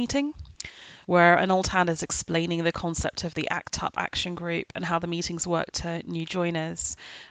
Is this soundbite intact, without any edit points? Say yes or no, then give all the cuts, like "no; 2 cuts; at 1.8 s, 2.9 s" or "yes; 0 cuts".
yes; 0 cuts